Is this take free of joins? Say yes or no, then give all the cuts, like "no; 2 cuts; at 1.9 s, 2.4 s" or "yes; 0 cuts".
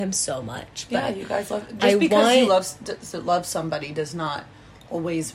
yes; 0 cuts